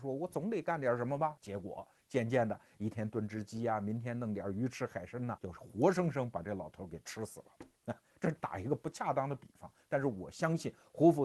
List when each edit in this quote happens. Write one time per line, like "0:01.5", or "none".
0:01.4
0:05.4